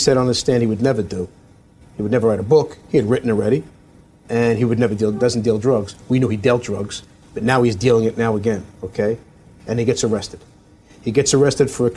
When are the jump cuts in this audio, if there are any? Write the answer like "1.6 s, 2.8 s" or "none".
2.8 s, 8.7 s